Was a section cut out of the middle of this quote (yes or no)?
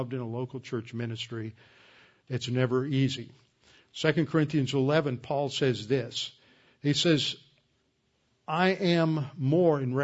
no